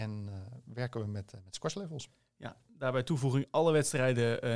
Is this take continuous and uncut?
yes; 0 cuts

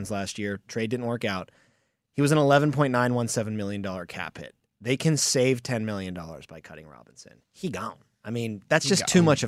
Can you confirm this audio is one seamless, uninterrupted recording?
yes; 0 cuts

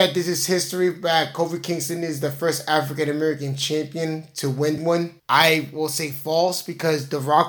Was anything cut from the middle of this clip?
yes; 2 cuts; at 4.8 s, 5.2 s

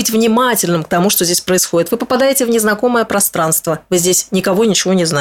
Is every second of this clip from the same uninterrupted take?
yes; 0 cuts

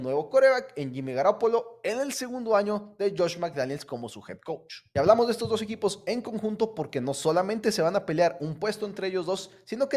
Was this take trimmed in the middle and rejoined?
no; 0 cuts

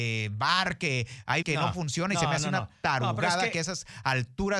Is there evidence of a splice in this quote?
yes; 1 cut; at 1.4 s

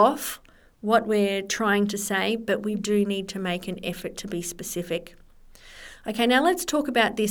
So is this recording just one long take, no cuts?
no; 1 cut; at 2.7 s

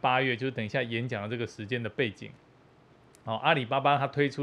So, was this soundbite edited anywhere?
no; 0 cuts

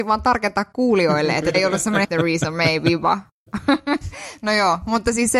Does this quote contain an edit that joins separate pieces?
yes; 2 cuts; at 1.5 s, 2.0 s

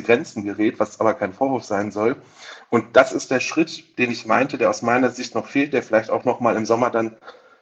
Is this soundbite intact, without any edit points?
yes; 0 cuts

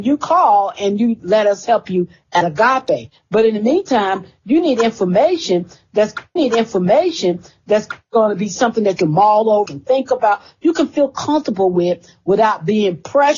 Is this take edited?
yes; 3 cuts; at 6.4 s, 9.0 s, 9.7 s

